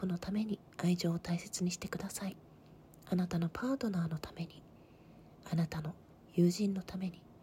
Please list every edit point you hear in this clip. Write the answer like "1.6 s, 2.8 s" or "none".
none